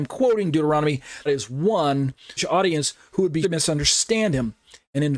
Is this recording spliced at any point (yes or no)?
yes